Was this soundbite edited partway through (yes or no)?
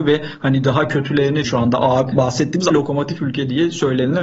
yes